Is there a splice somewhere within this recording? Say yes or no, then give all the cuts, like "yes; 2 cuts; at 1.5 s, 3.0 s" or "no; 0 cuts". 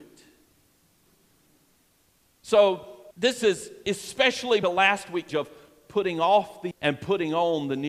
yes; 4 cuts; at 3.1 s, 4.6 s, 5.3 s, 6.7 s